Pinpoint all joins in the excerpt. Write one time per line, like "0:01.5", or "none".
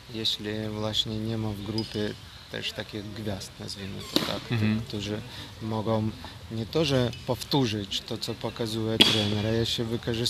none